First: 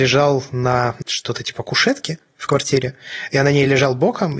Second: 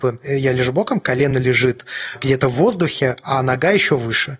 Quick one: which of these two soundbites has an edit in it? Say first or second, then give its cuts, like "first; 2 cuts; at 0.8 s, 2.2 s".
first; 1 cut; at 1.0 s